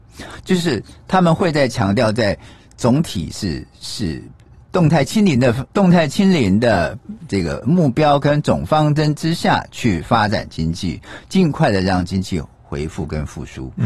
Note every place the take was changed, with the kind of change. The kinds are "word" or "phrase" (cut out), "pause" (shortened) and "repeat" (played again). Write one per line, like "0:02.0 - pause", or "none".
0:05.7 - pause